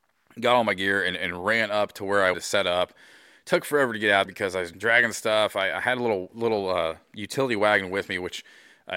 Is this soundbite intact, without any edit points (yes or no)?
no